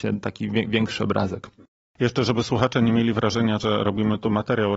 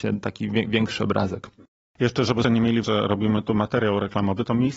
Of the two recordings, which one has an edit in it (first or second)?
second